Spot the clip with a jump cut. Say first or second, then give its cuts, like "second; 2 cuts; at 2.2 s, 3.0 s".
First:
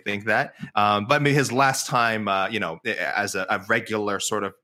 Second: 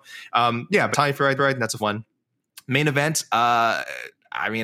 second; 3 cuts; at 0.9 s, 1.4 s, 1.8 s